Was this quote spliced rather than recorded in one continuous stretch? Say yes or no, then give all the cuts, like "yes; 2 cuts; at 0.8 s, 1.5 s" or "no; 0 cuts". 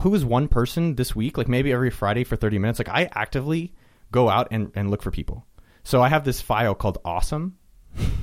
no; 0 cuts